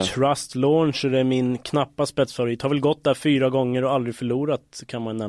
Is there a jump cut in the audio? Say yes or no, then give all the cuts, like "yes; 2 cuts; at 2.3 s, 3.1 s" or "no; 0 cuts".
no; 0 cuts